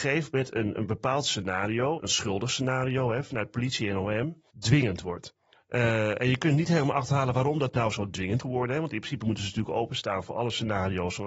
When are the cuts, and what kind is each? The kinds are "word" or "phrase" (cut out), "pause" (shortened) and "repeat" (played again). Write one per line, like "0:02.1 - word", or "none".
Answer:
0:02.0 - word
0:04.5 - pause
0:08.4 - word